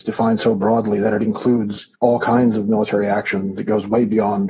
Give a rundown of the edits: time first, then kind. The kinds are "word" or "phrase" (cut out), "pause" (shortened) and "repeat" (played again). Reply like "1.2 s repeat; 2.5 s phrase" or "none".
1.9 s pause